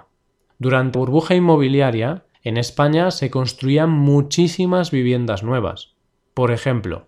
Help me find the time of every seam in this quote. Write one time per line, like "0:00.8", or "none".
0:00.9
0:02.3